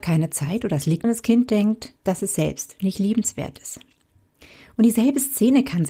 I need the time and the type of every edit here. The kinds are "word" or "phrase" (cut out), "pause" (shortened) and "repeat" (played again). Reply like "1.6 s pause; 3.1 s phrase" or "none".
1.0 s phrase; 2.0 s pause